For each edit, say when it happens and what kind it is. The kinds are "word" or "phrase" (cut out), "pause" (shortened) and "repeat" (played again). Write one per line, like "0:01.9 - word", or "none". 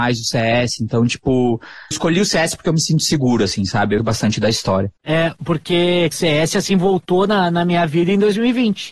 0:01.9 - phrase
0:04.0 - word
0:05.0 - pause
0:06.1 - phrase